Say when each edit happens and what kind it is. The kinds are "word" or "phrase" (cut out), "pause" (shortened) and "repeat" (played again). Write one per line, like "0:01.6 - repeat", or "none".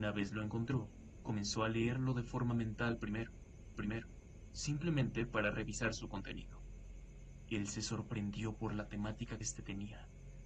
0:03.7 - repeat
0:09.4 - word